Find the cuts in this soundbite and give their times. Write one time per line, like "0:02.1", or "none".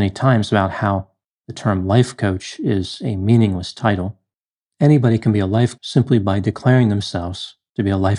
0:05.8